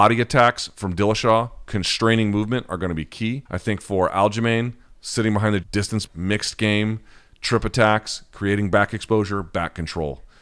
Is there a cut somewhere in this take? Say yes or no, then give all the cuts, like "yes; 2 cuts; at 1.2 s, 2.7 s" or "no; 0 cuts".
yes; 3 cuts; at 3.5 s, 5.6 s, 6.1 s